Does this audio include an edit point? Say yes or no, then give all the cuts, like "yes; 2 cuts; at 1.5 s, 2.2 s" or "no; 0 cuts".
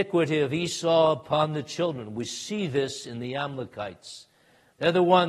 no; 0 cuts